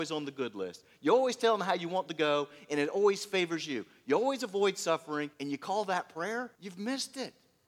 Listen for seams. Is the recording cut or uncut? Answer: cut